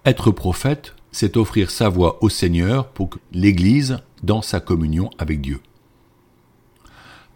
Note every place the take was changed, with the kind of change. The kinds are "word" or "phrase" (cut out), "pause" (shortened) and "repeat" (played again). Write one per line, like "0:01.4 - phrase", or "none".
0:01.0 - pause
0:03.1 - word